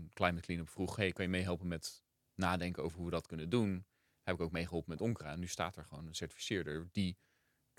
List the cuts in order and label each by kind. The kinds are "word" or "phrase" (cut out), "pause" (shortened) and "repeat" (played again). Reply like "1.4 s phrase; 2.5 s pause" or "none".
none